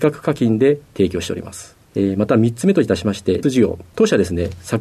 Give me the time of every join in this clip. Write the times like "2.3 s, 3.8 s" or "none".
3.4 s